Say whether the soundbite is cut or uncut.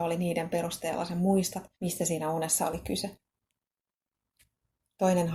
cut